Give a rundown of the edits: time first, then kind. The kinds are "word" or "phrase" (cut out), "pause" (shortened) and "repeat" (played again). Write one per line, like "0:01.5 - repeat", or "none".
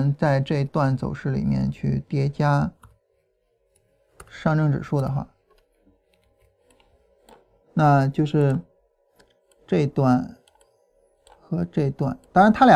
none